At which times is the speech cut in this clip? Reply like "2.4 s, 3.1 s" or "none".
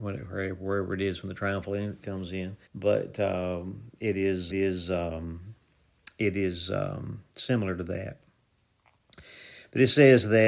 2.0 s, 2.7 s, 4.5 s